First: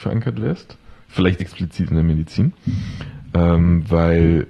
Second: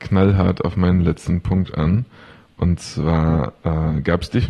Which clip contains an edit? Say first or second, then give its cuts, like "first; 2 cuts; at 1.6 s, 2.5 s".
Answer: first; 1 cut; at 1.4 s